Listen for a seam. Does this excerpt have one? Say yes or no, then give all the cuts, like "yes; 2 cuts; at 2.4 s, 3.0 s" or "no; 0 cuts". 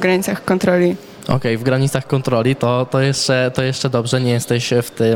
no; 0 cuts